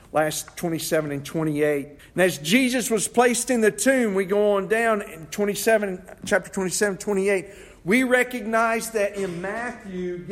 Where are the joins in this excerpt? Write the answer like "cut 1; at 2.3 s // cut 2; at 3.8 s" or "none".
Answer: cut 1; at 2.0 s